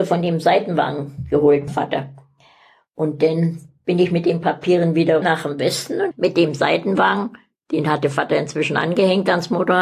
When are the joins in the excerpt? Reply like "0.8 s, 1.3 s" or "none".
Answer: 1.7 s, 3.8 s, 5.2 s, 6.1 s